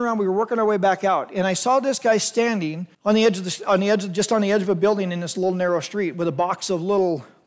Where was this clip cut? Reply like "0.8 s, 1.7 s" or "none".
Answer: 2.9 s